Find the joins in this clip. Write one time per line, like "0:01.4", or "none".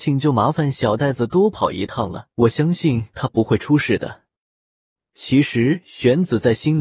0:02.3